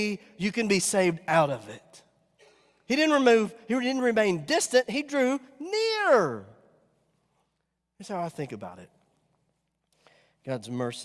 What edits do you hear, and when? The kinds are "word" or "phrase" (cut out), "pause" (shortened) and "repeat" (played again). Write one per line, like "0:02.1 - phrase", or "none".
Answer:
none